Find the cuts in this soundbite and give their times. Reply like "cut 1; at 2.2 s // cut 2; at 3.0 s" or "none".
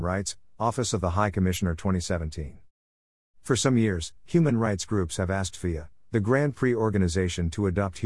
none